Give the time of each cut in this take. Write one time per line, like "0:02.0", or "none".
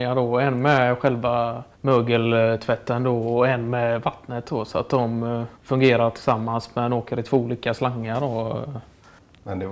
0:01.7
0:05.5